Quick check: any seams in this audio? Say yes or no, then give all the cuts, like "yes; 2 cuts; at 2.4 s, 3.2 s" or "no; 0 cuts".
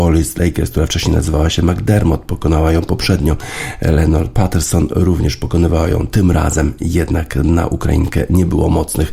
no; 0 cuts